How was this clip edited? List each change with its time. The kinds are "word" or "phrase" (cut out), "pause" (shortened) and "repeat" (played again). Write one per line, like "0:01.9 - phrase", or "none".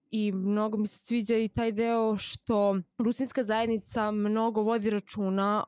0:02.9 - pause